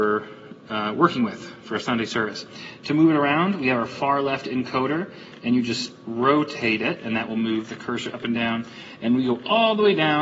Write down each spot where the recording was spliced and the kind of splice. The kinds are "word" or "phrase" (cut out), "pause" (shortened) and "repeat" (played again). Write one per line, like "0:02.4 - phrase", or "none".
none